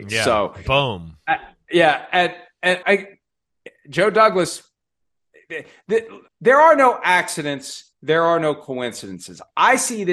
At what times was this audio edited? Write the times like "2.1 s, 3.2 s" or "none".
2.8 s, 3.8 s, 6.3 s, 7.9 s